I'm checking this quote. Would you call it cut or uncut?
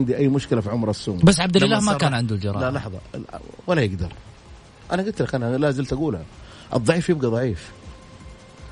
uncut